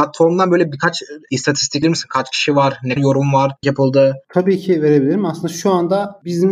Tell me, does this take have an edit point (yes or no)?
yes